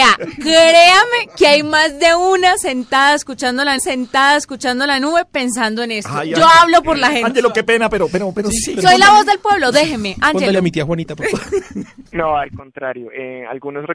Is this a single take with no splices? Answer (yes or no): no